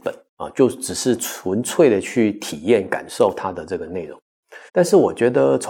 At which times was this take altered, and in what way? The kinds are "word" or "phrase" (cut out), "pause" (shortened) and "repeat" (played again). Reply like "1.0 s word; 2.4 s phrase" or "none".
4.7 s pause